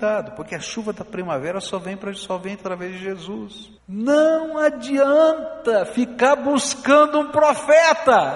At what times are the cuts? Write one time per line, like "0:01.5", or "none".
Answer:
0:03.8

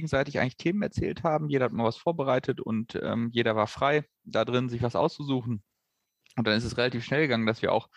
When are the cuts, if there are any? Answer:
none

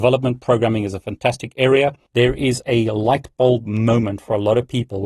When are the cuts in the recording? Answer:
none

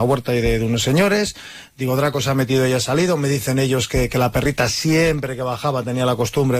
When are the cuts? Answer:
none

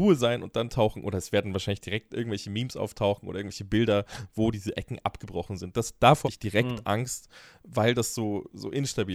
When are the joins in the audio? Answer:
0:06.2

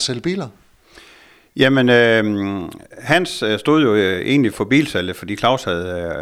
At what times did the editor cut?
0:04.5

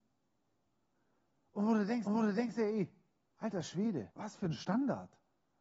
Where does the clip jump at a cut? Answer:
0:02.1
0:04.1

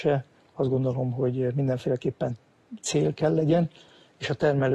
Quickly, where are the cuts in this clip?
none

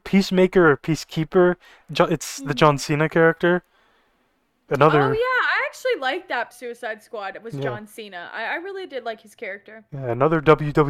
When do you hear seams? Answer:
0:06.5

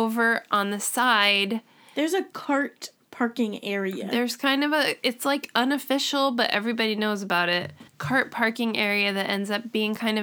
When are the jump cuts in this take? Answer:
0:07.9

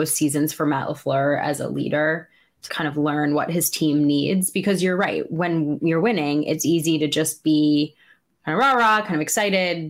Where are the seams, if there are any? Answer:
0:02.7

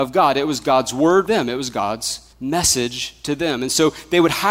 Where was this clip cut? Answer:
0:01.3
0:02.3

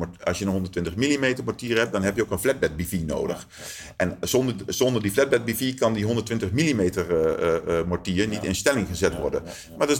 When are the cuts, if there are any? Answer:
none

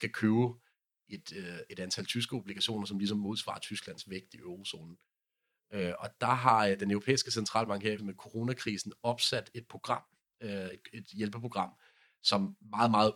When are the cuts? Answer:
0:08.0

